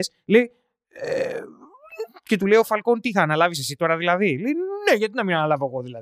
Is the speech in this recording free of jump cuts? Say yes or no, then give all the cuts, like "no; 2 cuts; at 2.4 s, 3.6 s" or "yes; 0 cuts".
yes; 0 cuts